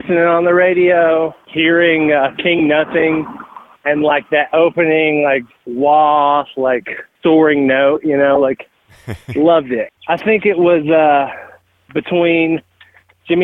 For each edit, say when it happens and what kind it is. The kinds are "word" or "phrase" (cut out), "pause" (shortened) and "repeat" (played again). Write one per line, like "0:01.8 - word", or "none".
none